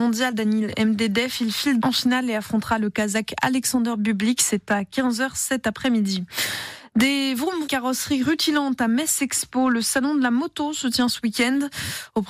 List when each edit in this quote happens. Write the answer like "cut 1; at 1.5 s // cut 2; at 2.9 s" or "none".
cut 1; at 1.8 s // cut 2; at 7.7 s